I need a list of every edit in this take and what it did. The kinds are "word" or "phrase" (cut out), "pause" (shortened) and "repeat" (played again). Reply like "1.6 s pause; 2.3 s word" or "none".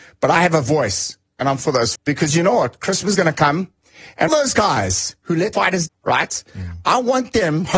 1.6 s word; 2.0 s word; 3.1 s word; 4.3 s word; 5.5 s word; 5.9 s word